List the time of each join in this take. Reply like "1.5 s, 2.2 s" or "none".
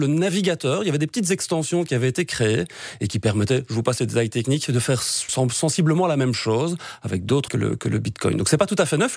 5.3 s, 7.5 s